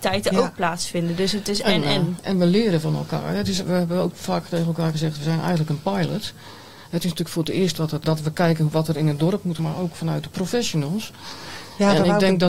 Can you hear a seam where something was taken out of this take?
yes; 3 cuts; at 3.6 s, 8.0 s, 9.6 s

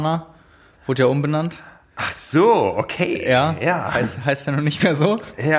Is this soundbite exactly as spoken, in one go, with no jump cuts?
yes; 0 cuts

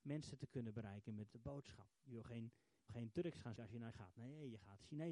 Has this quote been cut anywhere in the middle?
yes; 5 cuts; at 1.3 s, 1.9 s, 2.9 s, 3.6 s, 3.9 s

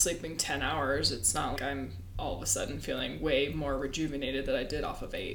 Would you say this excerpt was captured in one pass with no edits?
no; 1 cut; at 1.6 s

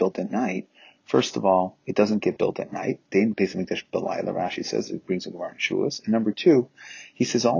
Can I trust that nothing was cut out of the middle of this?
no; 2 cuts; at 1.8 s, 3.3 s

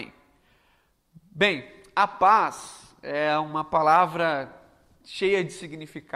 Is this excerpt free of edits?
yes; 0 cuts

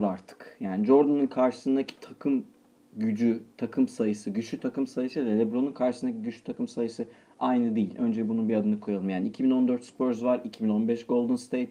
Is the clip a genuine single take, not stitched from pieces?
yes; 0 cuts

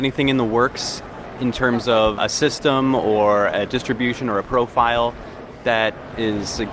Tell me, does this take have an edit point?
yes; 1 cut; at 2.2 s

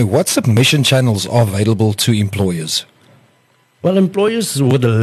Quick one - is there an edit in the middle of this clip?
no; 0 cuts

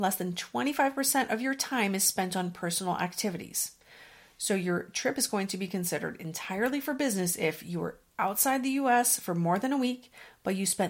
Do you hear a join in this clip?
no; 0 cuts

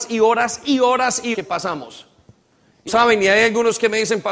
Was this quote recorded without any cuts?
no; 2 cuts; at 1.3 s, 2.9 s

